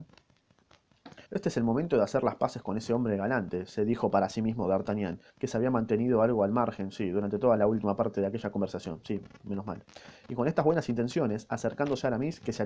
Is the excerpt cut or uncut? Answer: cut